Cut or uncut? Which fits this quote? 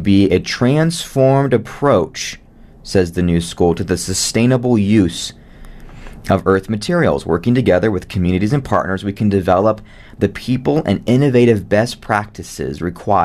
uncut